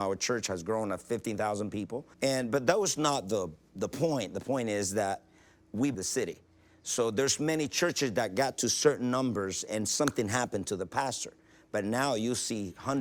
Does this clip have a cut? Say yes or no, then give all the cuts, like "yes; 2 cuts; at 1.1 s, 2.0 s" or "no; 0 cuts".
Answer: yes; 2 cuts; at 2.1 s, 5.9 s